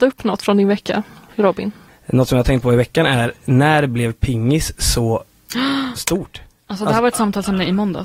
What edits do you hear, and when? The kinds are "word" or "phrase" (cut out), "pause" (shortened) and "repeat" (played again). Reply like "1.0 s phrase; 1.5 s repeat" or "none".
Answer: none

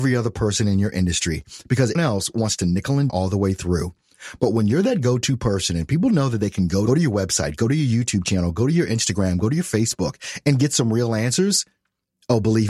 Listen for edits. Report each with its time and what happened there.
2.0 s word; 3.1 s phrase; 6.9 s phrase

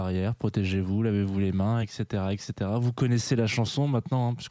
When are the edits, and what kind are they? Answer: none

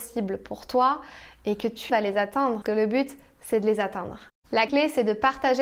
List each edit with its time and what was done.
1.9 s word; 2.6 s word; 4.7 s word

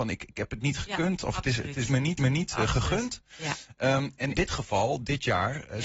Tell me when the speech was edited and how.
2.2 s repeat; 4.3 s word

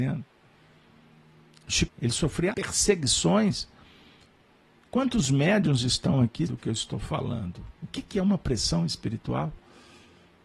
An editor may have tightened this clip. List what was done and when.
1.9 s word; 2.5 s word; 6.5 s word

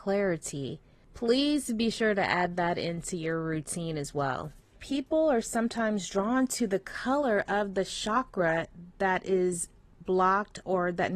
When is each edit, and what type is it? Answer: none

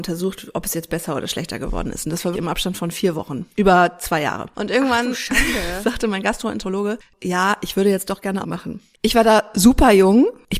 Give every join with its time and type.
2.3 s word; 8.4 s phrase

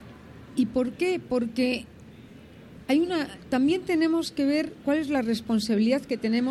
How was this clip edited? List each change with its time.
none

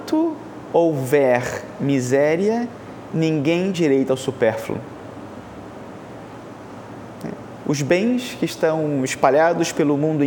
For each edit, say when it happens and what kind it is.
3.7 s word

